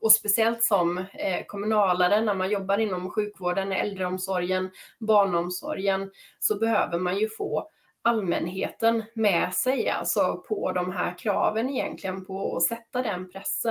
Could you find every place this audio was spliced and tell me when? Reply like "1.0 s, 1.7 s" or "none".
none